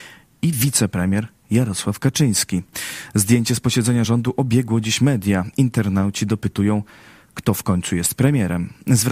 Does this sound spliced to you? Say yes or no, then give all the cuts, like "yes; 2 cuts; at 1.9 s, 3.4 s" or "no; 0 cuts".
no; 0 cuts